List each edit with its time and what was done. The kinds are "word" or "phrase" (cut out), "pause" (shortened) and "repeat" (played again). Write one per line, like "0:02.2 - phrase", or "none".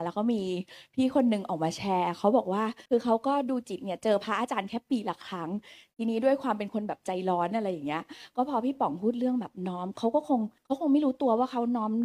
0:02.9 - pause
0:10.6 - pause